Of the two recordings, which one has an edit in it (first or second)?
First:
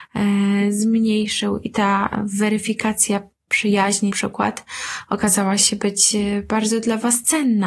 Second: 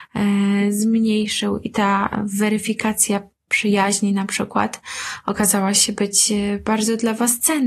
first